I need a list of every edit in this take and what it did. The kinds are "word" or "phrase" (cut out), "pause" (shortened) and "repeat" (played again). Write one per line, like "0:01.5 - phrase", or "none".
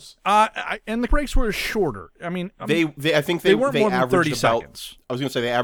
0:01.1 - word